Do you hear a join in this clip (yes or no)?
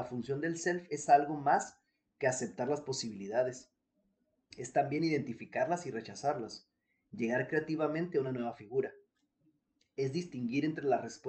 no